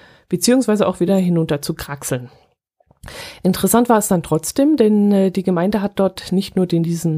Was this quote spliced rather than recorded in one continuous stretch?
no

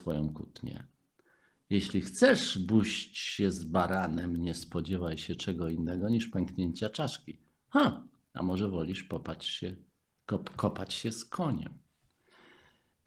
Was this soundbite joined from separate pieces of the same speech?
no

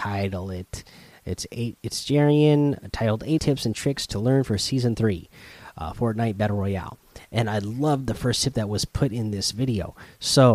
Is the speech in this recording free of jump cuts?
no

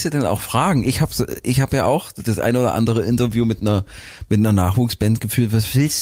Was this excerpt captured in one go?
yes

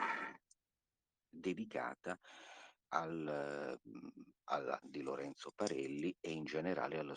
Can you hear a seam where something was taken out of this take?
yes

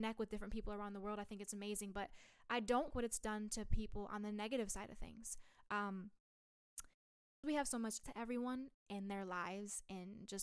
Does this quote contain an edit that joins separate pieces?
yes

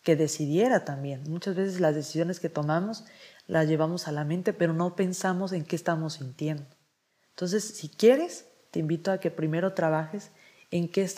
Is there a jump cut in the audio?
no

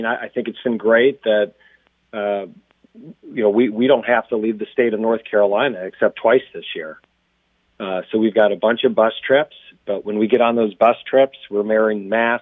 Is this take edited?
no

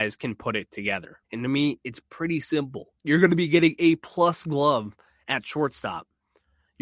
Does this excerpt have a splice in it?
yes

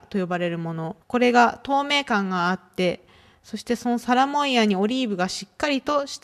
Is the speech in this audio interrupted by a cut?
yes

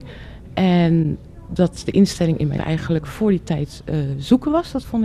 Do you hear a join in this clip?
yes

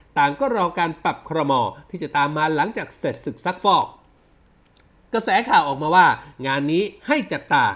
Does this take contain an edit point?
no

